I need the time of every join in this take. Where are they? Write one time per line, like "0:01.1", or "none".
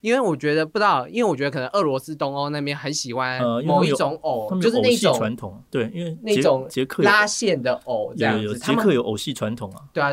none